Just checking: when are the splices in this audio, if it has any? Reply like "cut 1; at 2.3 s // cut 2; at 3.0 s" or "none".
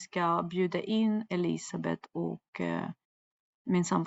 none